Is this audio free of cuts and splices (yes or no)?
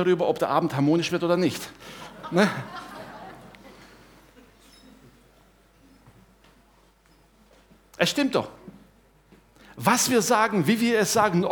yes